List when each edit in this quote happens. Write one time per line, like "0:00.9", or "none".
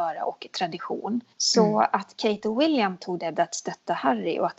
0:01.3
0:03.3